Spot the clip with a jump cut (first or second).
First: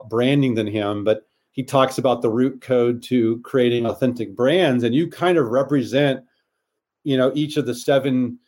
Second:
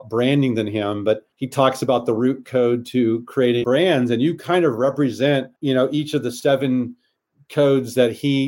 second